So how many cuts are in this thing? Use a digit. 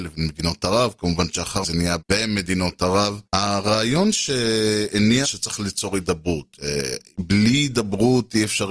4